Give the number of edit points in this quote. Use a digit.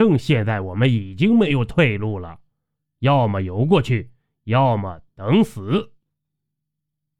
0